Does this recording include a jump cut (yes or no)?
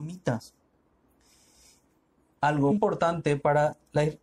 yes